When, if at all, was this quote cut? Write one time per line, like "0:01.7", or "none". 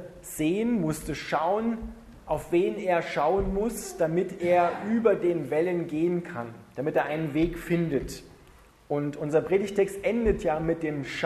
none